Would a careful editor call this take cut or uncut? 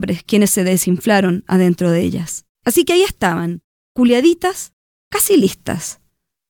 cut